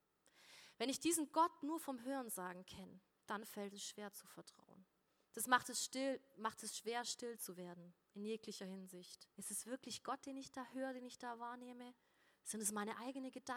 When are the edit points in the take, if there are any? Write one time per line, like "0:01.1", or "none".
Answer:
0:03.1
0:05.1
0:08.0
0:09.3

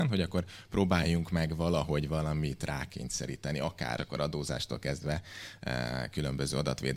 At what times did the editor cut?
0:04.0

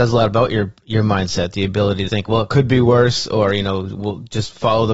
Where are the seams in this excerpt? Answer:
0:02.1

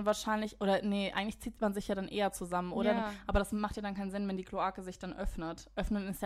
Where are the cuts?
none

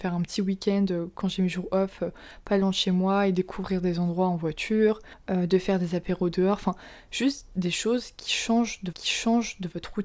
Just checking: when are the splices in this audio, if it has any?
0:08.9

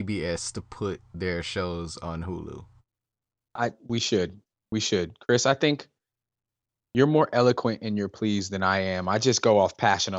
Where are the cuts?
none

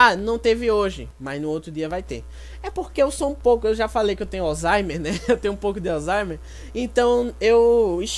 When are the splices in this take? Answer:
none

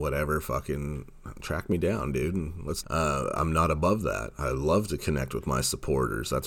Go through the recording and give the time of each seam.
0:02.8

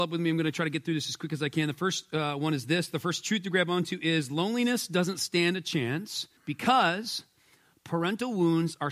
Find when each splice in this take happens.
0:06.4

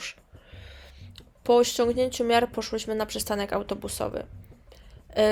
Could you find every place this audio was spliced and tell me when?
none

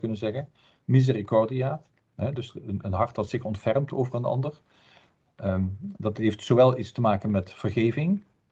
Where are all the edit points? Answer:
none

